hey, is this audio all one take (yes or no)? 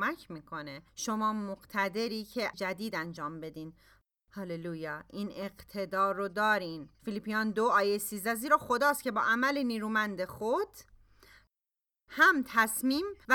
no